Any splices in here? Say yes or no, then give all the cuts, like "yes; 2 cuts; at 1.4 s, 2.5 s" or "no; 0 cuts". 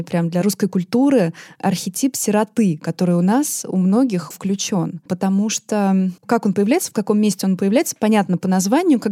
yes; 3 cuts; at 4.3 s, 5.1 s, 6.2 s